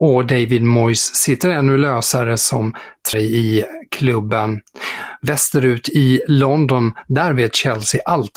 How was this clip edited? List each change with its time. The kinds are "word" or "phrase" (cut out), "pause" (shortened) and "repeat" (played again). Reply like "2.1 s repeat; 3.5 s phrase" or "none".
3.1 s word